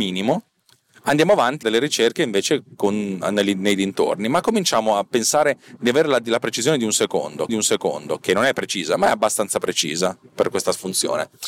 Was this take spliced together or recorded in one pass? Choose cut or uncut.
cut